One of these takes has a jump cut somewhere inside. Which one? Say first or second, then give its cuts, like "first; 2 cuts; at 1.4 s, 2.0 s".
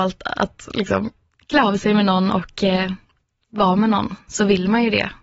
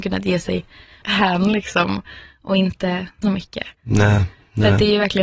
second; 3 cuts; at 1.0 s, 3.2 s, 3.8 s